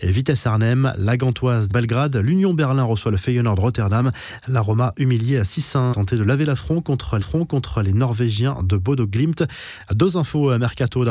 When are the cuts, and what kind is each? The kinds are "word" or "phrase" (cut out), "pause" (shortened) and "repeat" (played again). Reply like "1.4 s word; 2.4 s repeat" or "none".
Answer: 1.7 s phrase; 5.9 s phrase; 7.2 s repeat